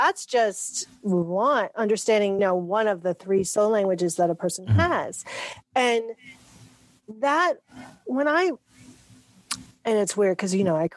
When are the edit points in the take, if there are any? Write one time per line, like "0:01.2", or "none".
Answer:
0:02.4

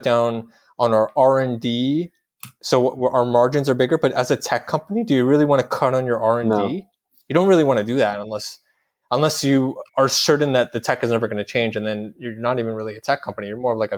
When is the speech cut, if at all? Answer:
0:09.9

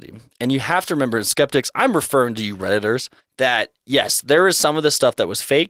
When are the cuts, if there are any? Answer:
0:03.2

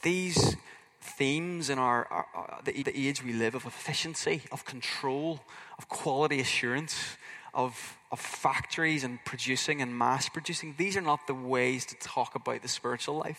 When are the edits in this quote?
0:02.8

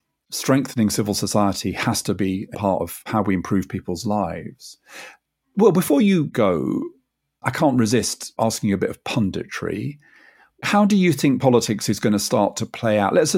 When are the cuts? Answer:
0:02.5

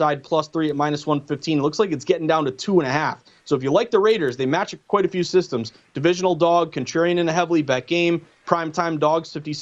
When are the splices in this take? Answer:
none

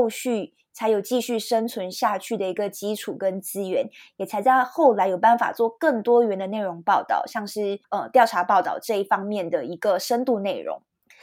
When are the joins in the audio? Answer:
0:07.8

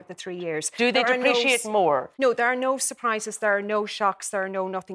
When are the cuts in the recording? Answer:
0:02.1

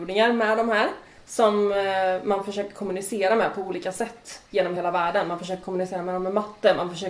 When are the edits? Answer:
none

